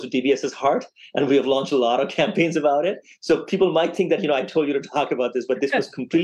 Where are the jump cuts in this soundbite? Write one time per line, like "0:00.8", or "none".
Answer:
none